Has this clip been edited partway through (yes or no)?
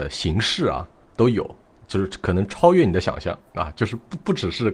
no